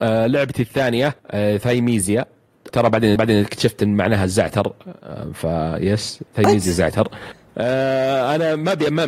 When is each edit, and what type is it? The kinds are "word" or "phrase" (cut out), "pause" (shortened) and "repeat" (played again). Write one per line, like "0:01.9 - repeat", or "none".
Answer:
0:01.2 - pause
0:02.7 - word
0:03.2 - repeat
0:06.3 - pause